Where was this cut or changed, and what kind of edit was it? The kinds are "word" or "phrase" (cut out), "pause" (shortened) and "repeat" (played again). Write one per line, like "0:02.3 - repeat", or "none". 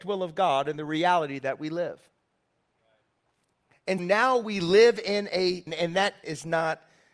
0:04.0 - word
0:05.7 - word
0:06.2 - word